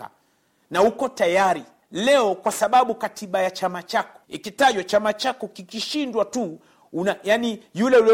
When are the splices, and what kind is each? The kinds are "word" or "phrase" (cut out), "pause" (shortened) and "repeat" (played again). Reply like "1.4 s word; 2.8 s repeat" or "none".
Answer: 1.8 s pause; 4.2 s pause